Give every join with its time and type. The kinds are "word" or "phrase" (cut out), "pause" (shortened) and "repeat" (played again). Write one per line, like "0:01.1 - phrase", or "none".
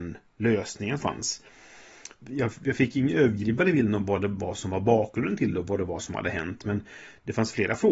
0:01.0 - word